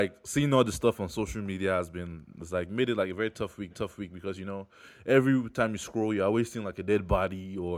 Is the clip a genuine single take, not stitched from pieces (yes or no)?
no